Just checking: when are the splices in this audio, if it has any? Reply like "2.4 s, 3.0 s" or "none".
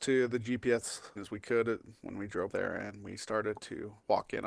1.2 s, 2.5 s